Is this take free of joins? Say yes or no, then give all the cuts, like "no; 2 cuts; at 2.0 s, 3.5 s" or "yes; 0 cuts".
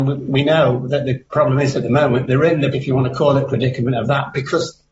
no; 2 cuts; at 1.3 s, 2.7 s